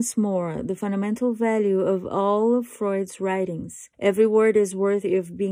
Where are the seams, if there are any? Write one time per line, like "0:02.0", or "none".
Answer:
0:03.9